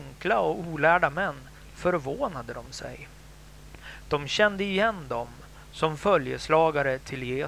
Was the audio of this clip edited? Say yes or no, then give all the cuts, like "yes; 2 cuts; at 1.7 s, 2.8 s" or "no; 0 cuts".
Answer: no; 0 cuts